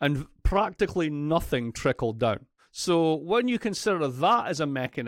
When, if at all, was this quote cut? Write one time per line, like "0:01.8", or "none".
0:02.6

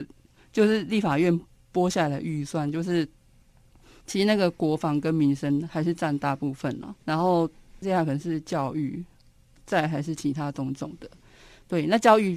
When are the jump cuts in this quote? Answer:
0:07.0

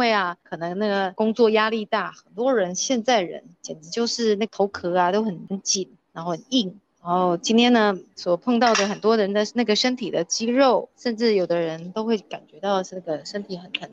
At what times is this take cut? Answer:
none

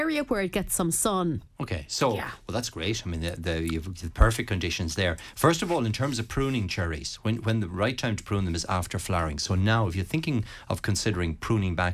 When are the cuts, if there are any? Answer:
0:01.5

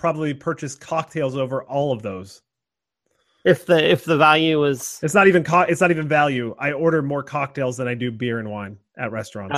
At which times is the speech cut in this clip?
none

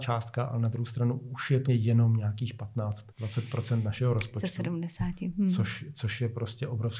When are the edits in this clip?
0:01.7
0:03.1

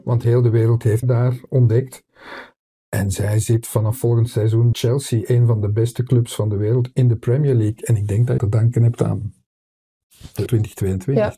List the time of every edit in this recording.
0:01.0
0:04.7
0:08.4
0:10.5

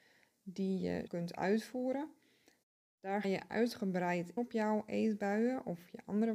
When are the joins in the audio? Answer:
0:01.1
0:03.2
0:04.4

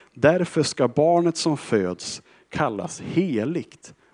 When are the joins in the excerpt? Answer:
none

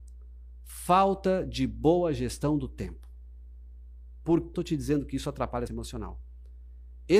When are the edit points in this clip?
0:04.5
0:05.7

